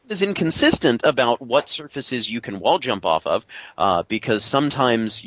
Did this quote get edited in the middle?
no; 0 cuts

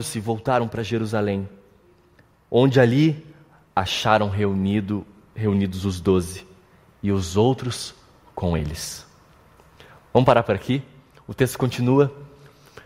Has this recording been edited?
no; 0 cuts

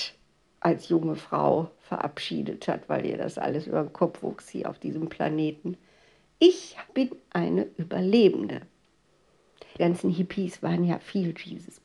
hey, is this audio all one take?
no; 2 cuts; at 6.9 s, 9.8 s

